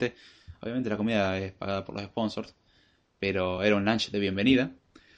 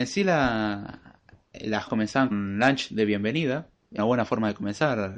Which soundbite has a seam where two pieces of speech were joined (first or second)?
second